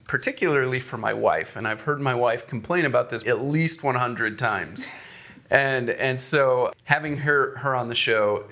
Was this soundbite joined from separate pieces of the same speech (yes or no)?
yes